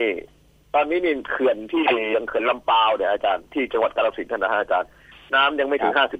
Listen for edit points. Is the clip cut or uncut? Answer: uncut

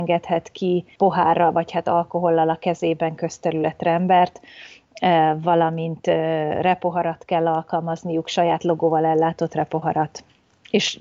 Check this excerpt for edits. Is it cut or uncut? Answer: uncut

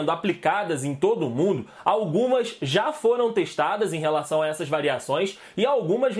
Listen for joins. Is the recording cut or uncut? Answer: uncut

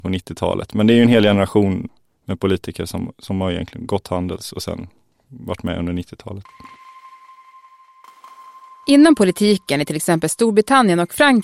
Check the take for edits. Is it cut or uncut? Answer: uncut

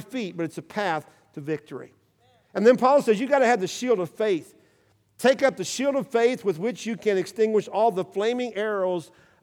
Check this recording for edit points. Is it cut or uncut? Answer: uncut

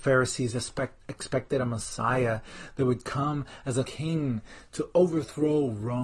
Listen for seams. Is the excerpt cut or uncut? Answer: cut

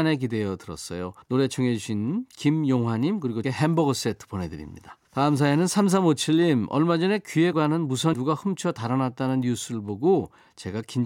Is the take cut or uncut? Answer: cut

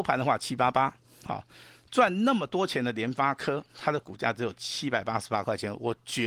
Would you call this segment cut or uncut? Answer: uncut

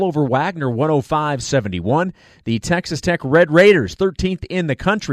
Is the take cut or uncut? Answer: uncut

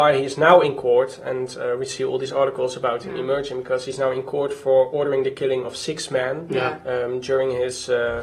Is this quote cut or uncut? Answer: uncut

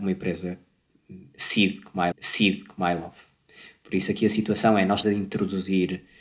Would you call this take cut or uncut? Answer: cut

